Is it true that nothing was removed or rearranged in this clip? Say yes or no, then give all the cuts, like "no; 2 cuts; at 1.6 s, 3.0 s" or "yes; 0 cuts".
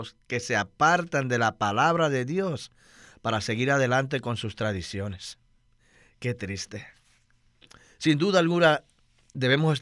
yes; 0 cuts